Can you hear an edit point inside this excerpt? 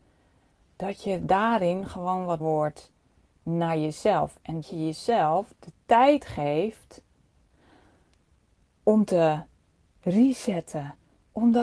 yes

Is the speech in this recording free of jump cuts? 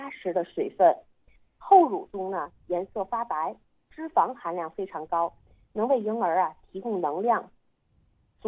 yes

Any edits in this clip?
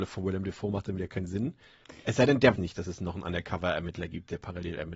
yes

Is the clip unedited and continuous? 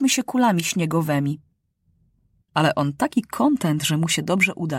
yes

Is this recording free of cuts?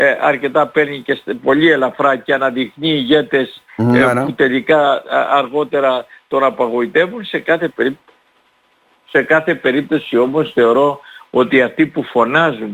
yes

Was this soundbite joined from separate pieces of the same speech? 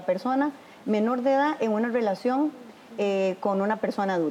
no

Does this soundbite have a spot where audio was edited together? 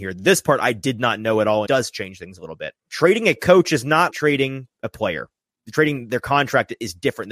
yes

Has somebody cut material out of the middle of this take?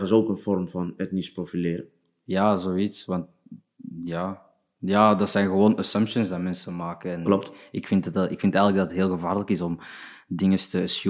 no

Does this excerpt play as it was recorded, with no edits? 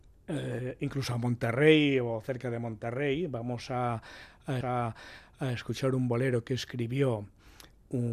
no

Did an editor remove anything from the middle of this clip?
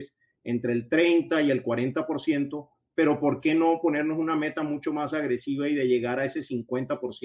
no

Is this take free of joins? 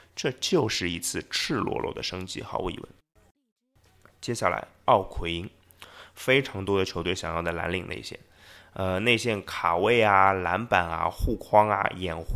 yes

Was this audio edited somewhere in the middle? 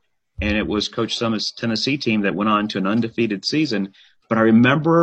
no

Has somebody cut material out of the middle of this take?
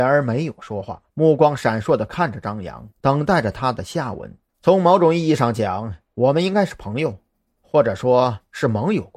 yes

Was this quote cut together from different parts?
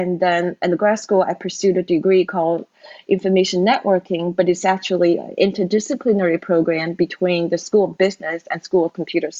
no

